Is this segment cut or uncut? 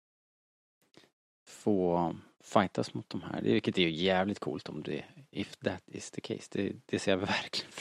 uncut